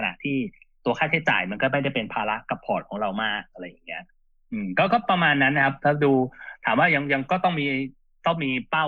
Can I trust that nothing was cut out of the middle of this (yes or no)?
yes